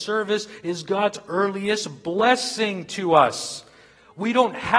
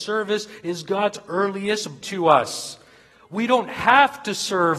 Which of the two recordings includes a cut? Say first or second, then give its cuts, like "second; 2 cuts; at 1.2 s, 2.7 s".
second; 1 cut; at 2.0 s